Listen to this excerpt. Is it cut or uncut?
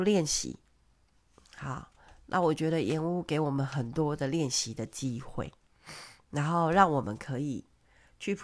uncut